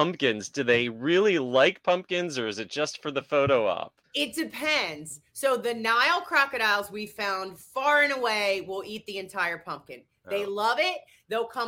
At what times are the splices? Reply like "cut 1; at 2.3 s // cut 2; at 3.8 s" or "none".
cut 1; at 4.0 s